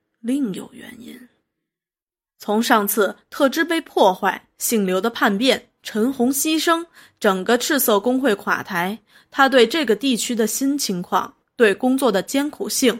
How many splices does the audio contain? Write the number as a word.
zero